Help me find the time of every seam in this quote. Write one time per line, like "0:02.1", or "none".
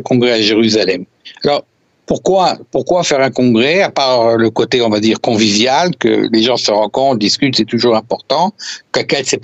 none